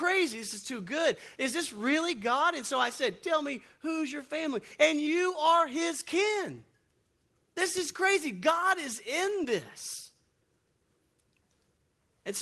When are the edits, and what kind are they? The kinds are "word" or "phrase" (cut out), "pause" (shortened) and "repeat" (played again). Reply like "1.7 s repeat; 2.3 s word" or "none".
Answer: none